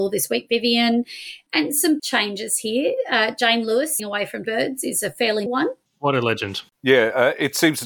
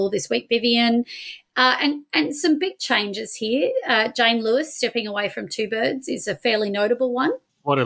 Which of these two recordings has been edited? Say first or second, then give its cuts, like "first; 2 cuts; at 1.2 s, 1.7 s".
first; 5 cuts; at 1.5 s, 2.0 s, 4.0 s, 4.4 s, 5.5 s